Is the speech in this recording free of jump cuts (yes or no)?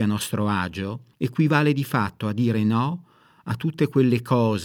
no